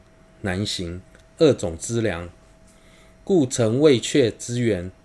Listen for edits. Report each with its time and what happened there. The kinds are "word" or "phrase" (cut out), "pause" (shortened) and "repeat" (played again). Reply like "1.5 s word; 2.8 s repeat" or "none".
none